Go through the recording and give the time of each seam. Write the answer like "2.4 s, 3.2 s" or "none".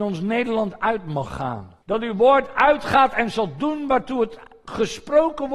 1.8 s